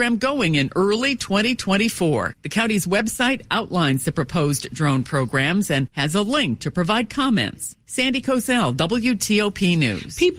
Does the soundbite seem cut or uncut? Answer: uncut